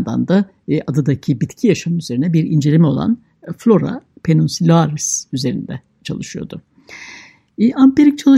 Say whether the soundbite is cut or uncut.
uncut